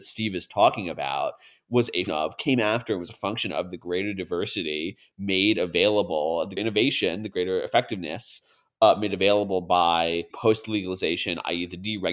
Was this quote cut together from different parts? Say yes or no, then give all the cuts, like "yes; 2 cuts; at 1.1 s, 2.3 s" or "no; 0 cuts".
yes; 3 cuts; at 2.1 s, 6.6 s, 10.3 s